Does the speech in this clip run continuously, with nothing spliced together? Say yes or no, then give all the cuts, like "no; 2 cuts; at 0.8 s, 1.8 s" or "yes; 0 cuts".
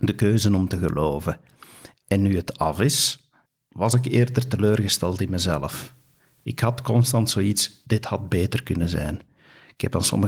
yes; 0 cuts